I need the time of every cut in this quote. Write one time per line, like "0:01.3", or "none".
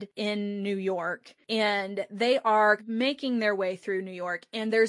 0:02.8